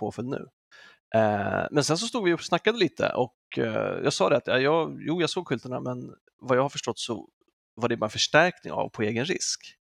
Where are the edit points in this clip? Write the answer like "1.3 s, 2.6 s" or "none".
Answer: none

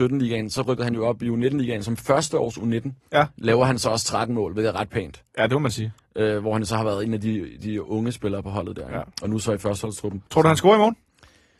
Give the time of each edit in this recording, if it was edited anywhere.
3.0 s, 9.1 s, 10.3 s

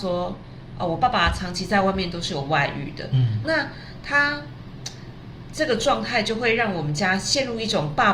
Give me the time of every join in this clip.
3.4 s

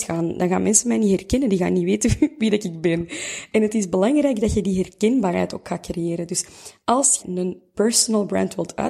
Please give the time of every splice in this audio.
7.2 s

